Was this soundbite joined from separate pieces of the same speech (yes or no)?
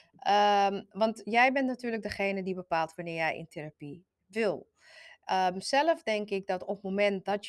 no